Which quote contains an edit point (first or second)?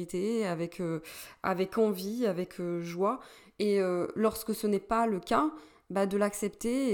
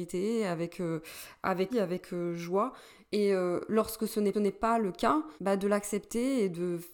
second